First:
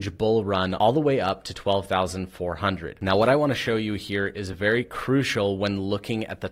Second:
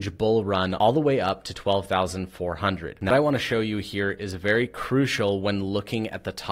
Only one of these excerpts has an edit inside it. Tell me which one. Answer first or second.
second